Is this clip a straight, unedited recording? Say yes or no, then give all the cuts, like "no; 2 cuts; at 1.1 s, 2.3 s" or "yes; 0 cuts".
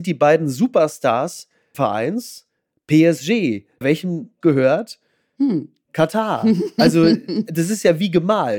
no; 3 cuts; at 1.7 s, 3.8 s, 4.4 s